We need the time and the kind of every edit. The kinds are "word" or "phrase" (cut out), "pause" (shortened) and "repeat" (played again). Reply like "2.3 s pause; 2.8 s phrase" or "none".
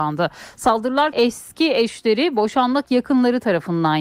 1.1 s word; 2.8 s phrase